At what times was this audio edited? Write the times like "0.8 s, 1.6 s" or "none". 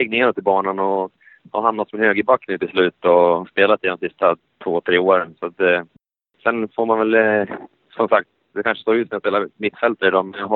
none